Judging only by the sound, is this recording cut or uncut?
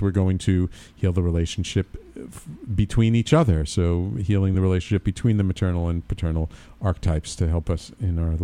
uncut